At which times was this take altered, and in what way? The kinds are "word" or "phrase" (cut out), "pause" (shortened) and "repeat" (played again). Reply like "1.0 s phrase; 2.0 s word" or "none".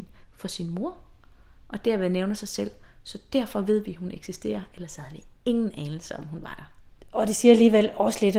none